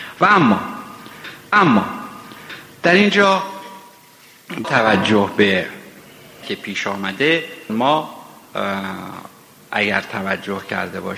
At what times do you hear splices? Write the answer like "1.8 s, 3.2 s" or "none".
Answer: 1.5 s, 4.6 s, 6.4 s, 7.7 s